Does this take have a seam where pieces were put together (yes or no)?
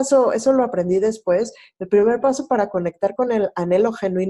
no